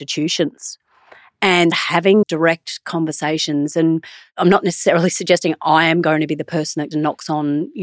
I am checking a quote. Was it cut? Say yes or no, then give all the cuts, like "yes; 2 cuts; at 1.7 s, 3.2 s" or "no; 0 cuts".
yes; 3 cuts; at 1.7 s, 2.2 s, 6.9 s